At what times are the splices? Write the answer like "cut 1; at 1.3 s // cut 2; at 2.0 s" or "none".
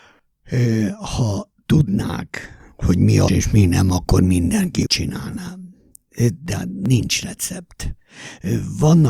cut 1; at 3.3 s // cut 2; at 4.9 s